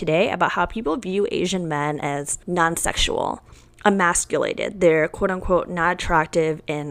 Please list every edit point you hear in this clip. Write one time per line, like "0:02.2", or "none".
0:02.4